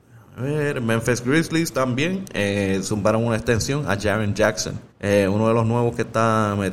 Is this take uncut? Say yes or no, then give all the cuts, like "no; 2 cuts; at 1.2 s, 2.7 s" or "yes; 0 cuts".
no; 1 cut; at 4.9 s